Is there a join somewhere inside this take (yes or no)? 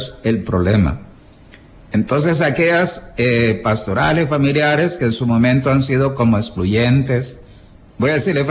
no